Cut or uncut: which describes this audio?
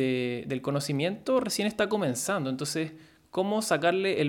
uncut